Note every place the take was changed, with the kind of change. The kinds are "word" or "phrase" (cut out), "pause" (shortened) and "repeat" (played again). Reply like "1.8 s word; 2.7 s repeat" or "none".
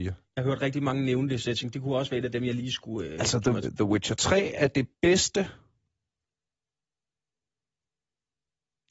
3.6 s word; 4.9 s pause